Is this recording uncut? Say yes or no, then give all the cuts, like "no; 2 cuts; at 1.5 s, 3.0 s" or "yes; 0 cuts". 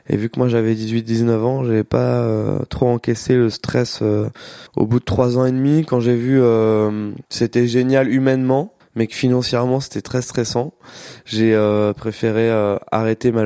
no; 2 cuts; at 4.7 s, 8.8 s